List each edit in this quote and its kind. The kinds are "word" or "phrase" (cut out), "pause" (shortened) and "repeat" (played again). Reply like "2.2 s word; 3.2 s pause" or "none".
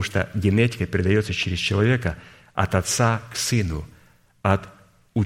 none